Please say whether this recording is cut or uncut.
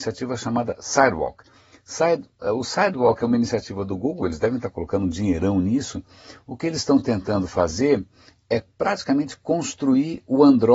uncut